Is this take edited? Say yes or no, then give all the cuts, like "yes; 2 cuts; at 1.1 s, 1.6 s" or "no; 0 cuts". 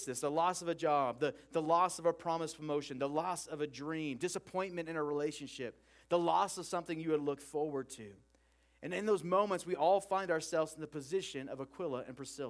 no; 0 cuts